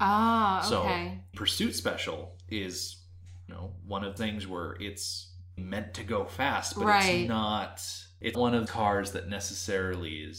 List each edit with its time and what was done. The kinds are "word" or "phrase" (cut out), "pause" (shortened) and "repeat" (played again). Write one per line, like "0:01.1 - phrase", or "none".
0:01.3 - word
0:03.5 - word
0:04.2 - word
0:05.6 - word
0:08.3 - word
0:08.7 - word